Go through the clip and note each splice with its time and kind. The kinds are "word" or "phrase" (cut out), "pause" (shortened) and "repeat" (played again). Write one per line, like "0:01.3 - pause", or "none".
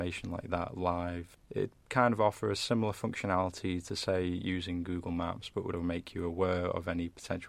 0:01.8 - pause
0:05.7 - word